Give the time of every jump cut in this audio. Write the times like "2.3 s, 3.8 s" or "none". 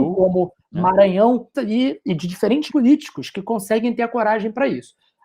1.5 s, 2.7 s